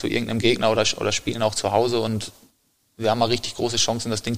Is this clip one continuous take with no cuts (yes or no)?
yes